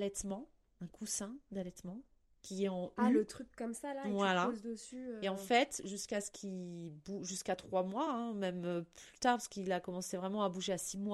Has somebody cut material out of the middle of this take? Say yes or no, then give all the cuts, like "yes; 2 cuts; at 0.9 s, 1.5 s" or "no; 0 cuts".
no; 0 cuts